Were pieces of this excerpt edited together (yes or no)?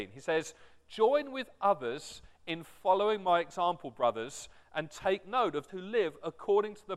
yes